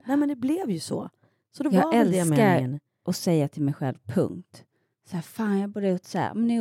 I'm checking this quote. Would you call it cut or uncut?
uncut